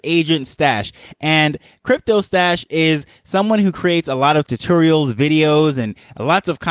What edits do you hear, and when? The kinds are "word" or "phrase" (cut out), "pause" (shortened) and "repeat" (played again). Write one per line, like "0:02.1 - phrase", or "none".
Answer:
none